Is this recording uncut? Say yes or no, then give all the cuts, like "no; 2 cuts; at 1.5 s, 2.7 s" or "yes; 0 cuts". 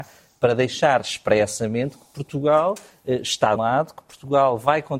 no; 1 cut; at 3.6 s